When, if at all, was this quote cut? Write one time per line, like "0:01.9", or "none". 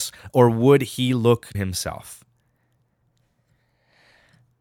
0:01.5

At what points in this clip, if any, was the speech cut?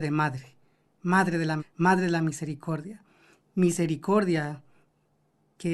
0:01.6

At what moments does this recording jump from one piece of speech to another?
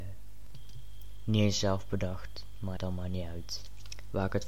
0:02.8

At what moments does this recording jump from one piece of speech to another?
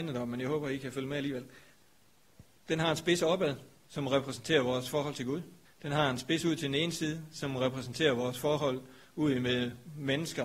0:05.7

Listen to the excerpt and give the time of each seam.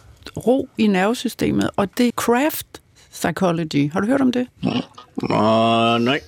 0:02.1

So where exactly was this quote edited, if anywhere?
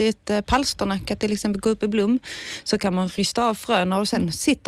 none

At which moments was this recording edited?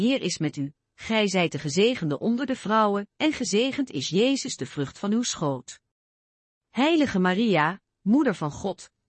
none

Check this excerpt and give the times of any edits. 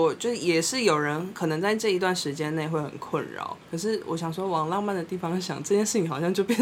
0:03.6

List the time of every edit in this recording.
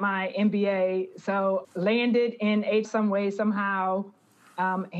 0:01.6
0:02.8

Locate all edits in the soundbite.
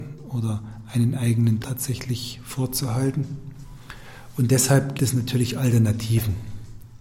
0:01.6
0:04.9

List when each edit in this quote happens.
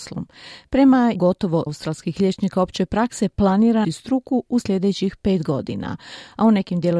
0:01.1
0:01.7
0:03.8

